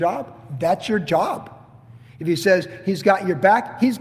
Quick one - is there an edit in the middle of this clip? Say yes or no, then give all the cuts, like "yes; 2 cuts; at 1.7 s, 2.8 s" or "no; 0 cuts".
no; 0 cuts